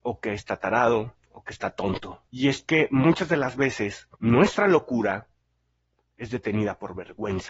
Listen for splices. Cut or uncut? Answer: cut